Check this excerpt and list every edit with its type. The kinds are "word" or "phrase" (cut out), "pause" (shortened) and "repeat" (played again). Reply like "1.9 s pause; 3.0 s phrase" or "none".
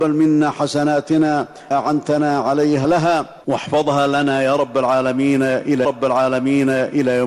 1.7 s word; 2.8 s word; 3.4 s pause; 5.8 s repeat

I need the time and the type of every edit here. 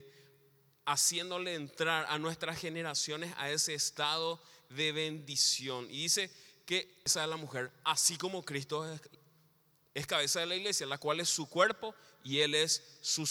none

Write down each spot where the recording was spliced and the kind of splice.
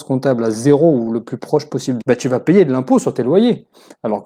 2.0 s word

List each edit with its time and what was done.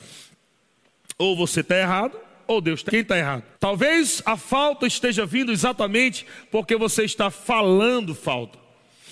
2.9 s word; 3.5 s pause

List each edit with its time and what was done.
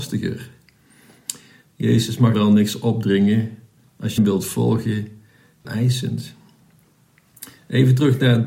2.3 s word; 4.2 s phrase; 5.6 s phrase

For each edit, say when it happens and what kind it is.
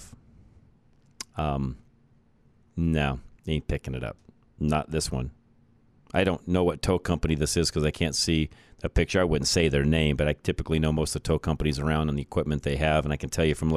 3.4 s pause

